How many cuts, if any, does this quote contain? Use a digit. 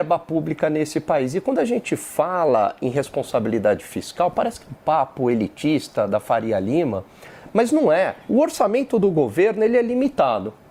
1